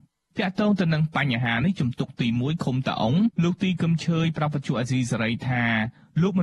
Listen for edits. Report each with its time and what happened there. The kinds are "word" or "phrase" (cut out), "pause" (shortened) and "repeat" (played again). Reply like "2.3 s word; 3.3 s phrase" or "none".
3.3 s pause